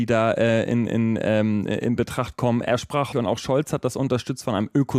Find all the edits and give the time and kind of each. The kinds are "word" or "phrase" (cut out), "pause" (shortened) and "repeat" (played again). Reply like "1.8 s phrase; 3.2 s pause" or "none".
3.1 s word